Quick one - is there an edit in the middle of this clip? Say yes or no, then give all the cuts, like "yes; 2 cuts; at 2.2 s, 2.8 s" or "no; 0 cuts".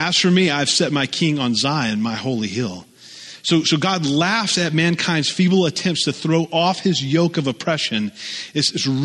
no; 0 cuts